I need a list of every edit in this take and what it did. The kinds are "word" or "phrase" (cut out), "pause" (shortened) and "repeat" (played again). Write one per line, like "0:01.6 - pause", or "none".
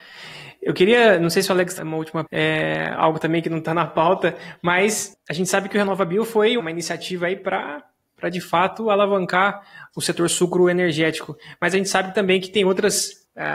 0:01.8 - word
0:02.3 - word
0:06.6 - word